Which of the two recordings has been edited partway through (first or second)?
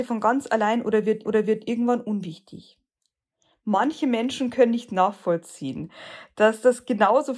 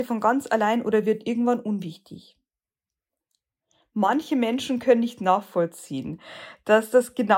first